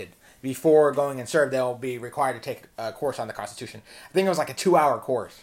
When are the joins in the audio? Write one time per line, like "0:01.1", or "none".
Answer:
none